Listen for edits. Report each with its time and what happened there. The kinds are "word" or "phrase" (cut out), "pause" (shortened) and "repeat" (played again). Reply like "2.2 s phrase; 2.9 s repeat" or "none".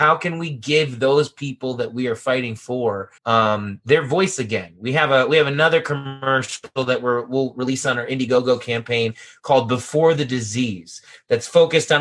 3.2 s pause